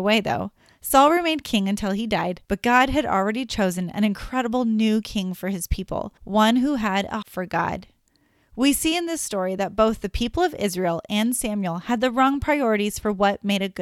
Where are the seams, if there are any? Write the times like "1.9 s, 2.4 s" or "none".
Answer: 2.4 s, 6.2 s, 7.2 s